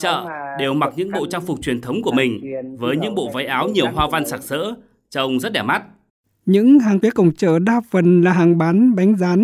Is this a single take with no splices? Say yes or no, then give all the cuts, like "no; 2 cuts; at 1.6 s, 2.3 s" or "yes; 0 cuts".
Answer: no; 1 cut; at 7.0 s